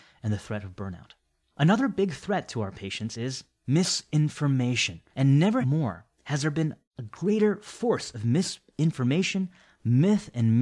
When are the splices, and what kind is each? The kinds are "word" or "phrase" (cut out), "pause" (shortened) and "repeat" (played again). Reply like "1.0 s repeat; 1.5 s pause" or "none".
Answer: none

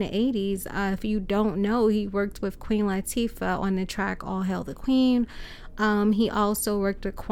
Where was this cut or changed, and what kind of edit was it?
none

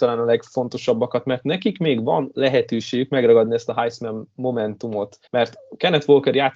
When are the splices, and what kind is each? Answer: 5.3 s pause

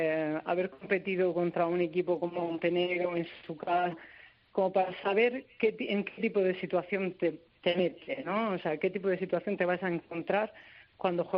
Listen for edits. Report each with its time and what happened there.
none

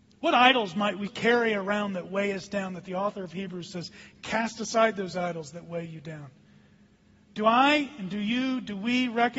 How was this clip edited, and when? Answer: 1.1 s word

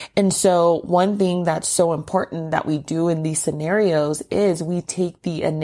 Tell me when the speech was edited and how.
none

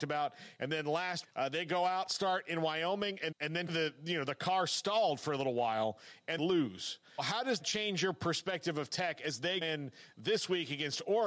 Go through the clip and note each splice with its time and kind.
1.2 s word; 2.1 s word; 3.3 s word; 3.7 s word; 6.4 s word; 7.2 s word; 7.6 s word; 9.6 s word

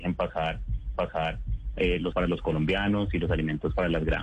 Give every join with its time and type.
1.0 s repeat; 2.1 s word

